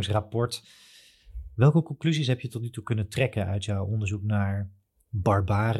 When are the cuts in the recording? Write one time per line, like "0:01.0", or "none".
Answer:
none

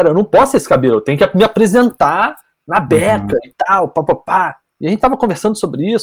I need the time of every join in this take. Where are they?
none

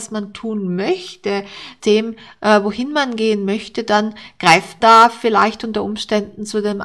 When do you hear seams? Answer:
0:01.8
0:04.8

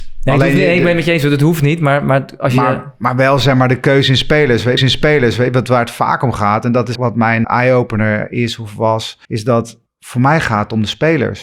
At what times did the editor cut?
0:04.8
0:06.9
0:07.4
0:09.2
0:09.9

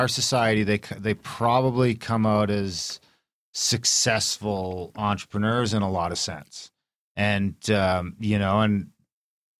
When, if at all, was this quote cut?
none

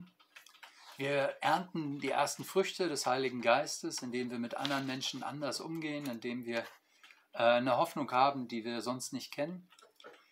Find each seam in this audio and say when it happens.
none

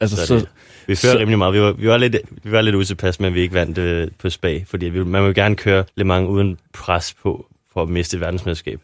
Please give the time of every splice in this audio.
0:05.9
0:06.7

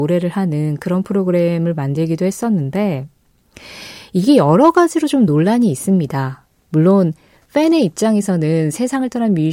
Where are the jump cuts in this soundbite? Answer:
none

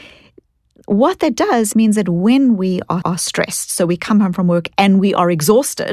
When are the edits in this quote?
0:01.7
0:03.0

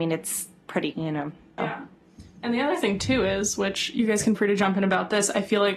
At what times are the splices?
0:00.9
0:01.6
0:04.3

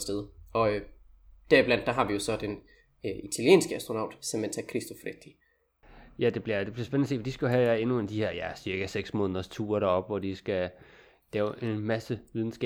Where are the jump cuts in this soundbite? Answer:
none

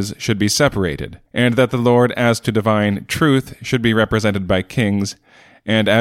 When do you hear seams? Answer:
0:01.3

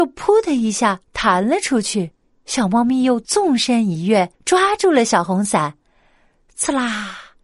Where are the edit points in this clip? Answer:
0:02.2
0:04.3

